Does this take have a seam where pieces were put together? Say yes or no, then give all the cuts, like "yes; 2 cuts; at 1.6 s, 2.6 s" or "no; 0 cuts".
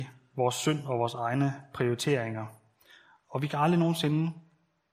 no; 0 cuts